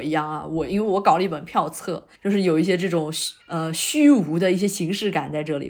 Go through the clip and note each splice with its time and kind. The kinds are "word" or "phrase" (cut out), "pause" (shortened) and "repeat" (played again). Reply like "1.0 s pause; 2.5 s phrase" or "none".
2.2 s pause; 3.4 s pause